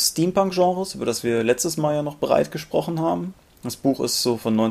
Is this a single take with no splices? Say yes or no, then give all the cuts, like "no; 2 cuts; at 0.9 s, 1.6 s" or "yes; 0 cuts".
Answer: yes; 0 cuts